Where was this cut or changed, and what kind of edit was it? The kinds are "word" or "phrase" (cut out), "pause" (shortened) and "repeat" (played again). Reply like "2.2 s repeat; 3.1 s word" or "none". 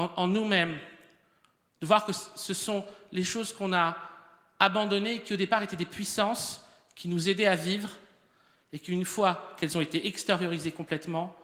none